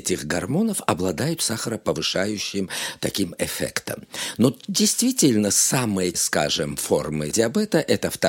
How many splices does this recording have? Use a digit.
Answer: 2